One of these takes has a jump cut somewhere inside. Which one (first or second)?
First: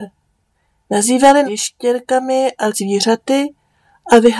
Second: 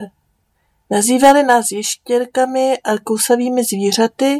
first